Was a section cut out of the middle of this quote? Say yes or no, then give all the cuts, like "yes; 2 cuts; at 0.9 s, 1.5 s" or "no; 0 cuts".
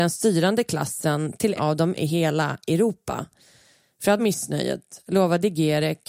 yes; 3 cuts; at 1.6 s, 2.0 s, 4.2 s